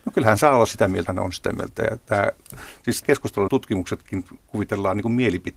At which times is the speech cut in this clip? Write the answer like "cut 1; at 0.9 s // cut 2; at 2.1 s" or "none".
cut 1; at 1.1 s // cut 2; at 3.0 s // cut 3; at 3.5 s